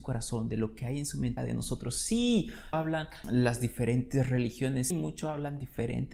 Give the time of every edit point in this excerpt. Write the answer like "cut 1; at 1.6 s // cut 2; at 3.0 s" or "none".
cut 1; at 1.4 s // cut 2; at 2.7 s // cut 3; at 3.2 s // cut 4; at 4.9 s